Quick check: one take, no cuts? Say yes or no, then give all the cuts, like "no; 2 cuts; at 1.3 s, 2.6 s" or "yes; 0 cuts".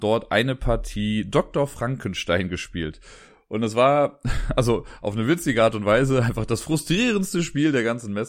yes; 0 cuts